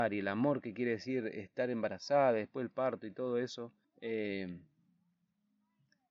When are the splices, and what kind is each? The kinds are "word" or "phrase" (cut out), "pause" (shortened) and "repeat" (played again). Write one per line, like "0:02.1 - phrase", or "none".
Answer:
0:03.8 - pause